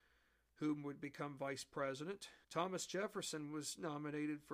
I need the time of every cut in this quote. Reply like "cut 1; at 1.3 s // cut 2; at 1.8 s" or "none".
cut 1; at 2.4 s